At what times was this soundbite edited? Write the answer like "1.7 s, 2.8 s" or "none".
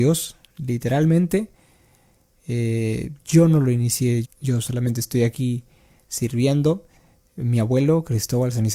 4.2 s